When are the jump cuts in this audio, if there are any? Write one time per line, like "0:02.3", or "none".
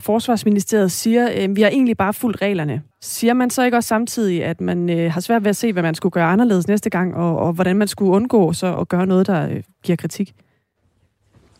0:00.9
0:02.9
0:08.8